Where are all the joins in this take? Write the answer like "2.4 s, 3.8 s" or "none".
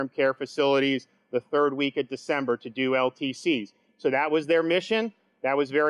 none